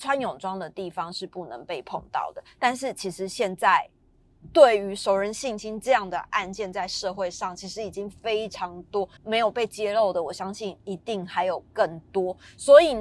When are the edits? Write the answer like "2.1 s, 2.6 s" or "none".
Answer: 9.2 s